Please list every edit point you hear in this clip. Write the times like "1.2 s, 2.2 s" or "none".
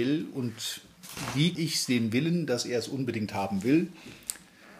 1.5 s